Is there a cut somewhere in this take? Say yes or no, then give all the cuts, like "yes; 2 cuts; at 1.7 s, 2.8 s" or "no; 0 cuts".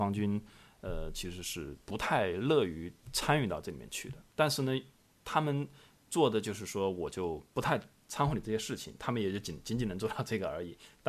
yes; 1 cut; at 4.3 s